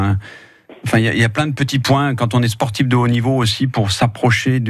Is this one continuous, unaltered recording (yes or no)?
yes